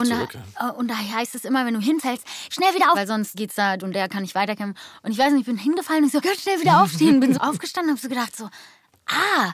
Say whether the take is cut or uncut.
cut